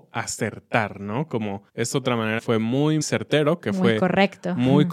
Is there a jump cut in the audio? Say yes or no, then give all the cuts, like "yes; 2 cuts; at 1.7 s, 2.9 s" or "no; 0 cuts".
yes; 3 cuts; at 1.7 s, 2.4 s, 3.0 s